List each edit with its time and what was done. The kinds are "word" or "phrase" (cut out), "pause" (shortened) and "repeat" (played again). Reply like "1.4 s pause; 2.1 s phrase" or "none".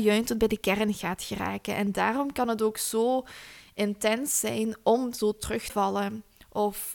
5.7 s word